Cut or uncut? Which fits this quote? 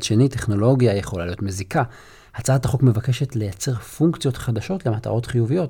uncut